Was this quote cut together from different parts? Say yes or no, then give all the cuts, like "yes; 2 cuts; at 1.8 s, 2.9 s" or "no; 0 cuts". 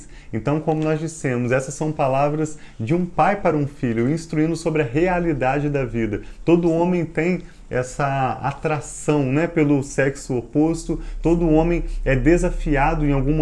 no; 0 cuts